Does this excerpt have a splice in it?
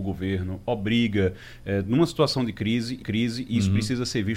yes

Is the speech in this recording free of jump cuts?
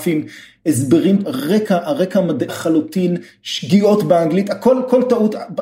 no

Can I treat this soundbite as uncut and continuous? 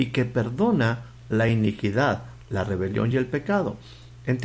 yes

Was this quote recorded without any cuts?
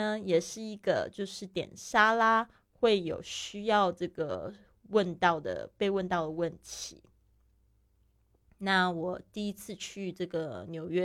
yes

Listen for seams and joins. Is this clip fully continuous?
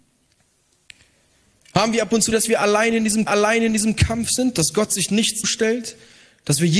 no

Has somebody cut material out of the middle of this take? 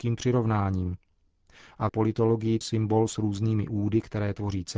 yes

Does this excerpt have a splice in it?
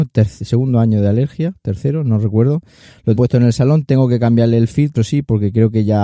yes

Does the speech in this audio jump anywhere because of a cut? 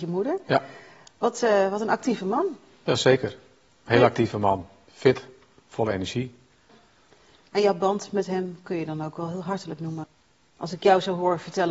no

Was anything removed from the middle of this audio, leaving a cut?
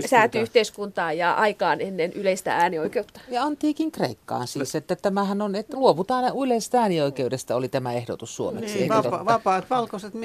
no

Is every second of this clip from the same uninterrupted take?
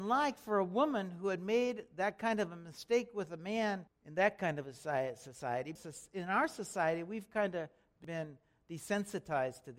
yes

